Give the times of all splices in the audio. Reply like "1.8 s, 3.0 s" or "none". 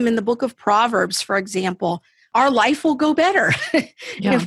none